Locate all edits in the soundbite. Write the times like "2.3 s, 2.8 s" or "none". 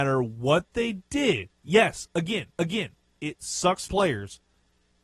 1.6 s, 2.5 s, 3.9 s